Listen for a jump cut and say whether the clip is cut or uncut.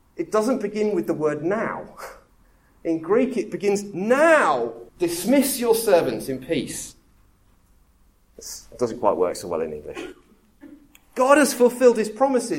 cut